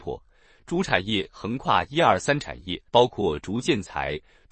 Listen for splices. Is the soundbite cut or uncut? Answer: cut